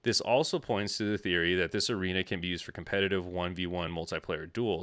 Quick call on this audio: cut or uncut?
uncut